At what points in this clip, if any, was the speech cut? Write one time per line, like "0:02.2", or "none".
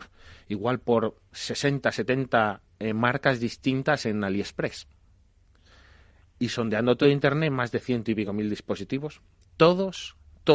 none